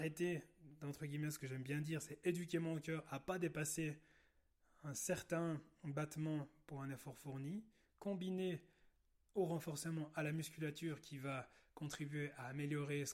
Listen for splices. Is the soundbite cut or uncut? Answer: uncut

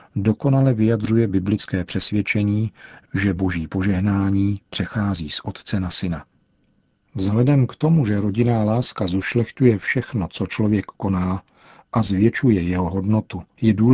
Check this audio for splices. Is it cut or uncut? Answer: uncut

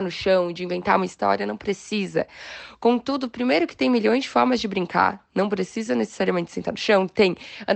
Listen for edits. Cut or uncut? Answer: uncut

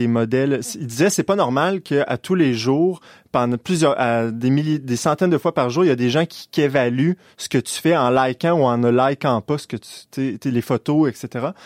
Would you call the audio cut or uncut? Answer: uncut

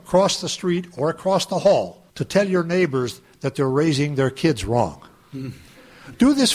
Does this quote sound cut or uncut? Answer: cut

